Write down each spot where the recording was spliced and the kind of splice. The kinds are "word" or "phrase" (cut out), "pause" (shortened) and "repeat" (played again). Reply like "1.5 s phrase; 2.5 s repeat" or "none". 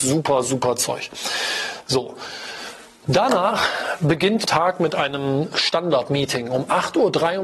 2.9 s pause; 4.5 s word